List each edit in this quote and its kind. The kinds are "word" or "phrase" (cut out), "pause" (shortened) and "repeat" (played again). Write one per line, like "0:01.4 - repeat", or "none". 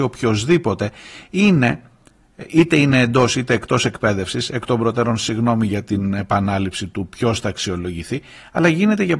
none